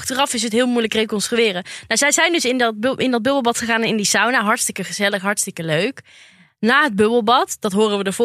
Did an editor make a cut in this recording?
no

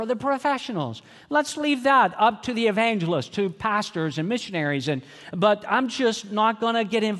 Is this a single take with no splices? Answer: yes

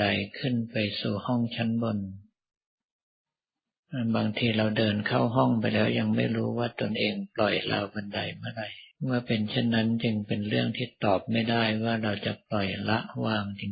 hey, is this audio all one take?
no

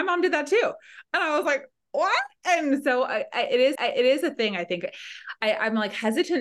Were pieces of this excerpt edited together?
yes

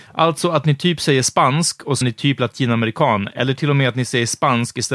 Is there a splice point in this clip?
yes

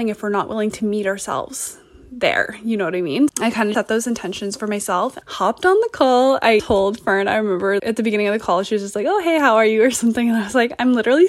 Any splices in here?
yes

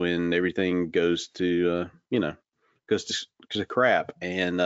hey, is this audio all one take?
yes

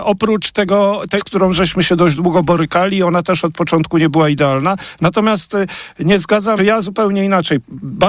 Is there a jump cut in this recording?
yes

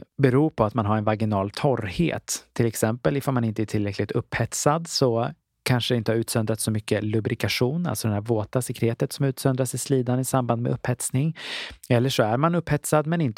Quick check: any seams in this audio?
no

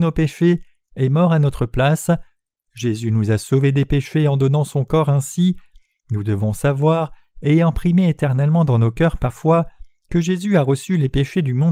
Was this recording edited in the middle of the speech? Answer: yes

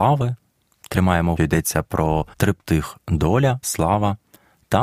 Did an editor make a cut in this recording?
yes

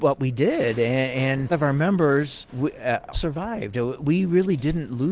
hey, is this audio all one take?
no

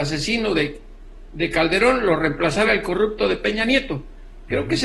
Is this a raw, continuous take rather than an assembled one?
yes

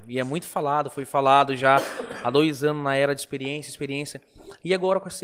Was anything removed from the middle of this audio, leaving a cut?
no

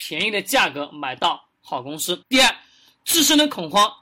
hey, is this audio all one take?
no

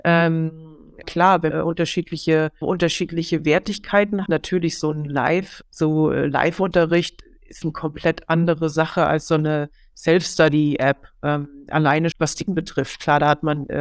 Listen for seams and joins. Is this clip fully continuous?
no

